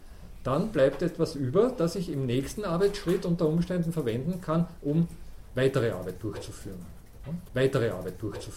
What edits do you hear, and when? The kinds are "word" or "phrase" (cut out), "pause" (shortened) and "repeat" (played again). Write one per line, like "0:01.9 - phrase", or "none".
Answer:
0:07.5 - repeat